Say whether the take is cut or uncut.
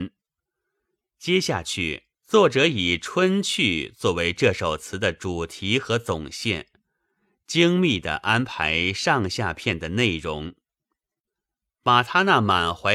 cut